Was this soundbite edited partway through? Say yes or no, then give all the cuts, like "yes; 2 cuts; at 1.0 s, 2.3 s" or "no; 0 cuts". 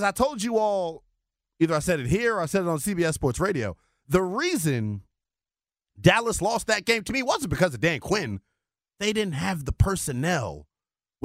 no; 0 cuts